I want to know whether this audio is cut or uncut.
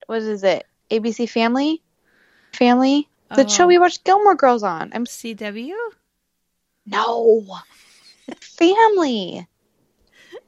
cut